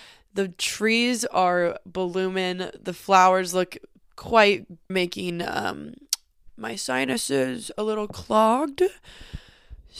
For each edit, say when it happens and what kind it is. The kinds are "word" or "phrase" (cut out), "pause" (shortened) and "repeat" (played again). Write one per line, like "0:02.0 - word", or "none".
0:04.9 - phrase